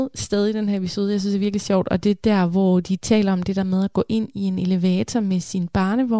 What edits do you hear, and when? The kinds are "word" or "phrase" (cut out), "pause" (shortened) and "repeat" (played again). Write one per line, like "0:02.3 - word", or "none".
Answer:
none

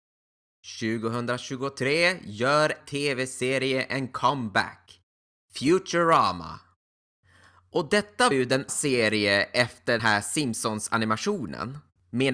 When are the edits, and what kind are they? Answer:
0:02.8 - word
0:08.3 - word
0:08.7 - word
0:10.0 - word

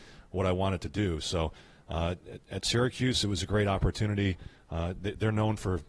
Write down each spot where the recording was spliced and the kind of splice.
none

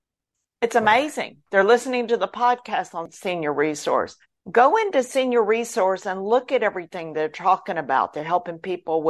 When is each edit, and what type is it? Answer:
0:04.2 - pause

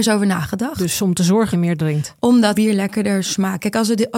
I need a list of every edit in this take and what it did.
0:01.5 - word
0:02.5 - word

